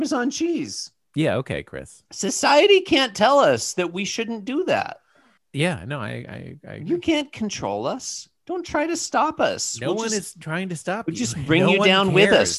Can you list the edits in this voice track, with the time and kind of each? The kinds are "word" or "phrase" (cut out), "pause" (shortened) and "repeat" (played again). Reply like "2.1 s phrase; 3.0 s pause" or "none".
2.1 s pause; 5.4 s pause

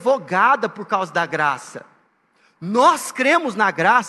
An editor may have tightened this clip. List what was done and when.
2.1 s pause

